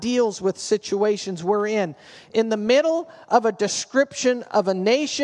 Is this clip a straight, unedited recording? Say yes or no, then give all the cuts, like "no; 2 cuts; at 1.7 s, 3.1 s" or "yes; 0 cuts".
yes; 0 cuts